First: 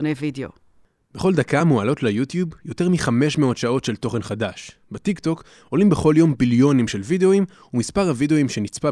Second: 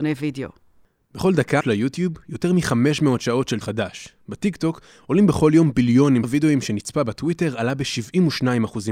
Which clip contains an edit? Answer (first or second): second